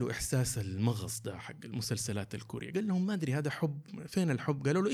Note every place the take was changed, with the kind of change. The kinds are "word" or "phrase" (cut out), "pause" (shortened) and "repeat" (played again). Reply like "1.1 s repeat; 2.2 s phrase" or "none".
none